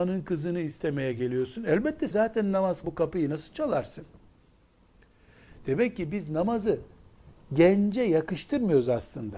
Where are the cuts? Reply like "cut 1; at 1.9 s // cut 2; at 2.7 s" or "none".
cut 1; at 2.1 s // cut 2; at 2.8 s